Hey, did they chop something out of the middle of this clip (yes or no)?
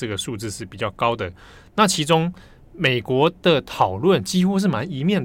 no